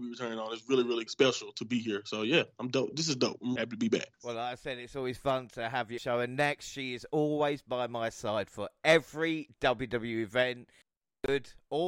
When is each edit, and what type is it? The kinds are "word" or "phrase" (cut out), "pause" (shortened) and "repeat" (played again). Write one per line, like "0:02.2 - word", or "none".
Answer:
0:01.1 - word
0:03.6 - word
0:04.1 - pause
0:06.0 - phrase